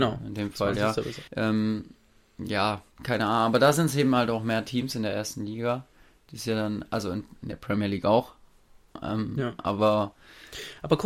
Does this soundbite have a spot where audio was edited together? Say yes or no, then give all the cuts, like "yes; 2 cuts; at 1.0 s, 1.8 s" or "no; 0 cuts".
yes; 1 cut; at 1.3 s